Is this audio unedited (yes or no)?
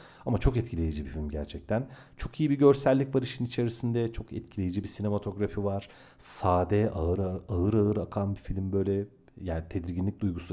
yes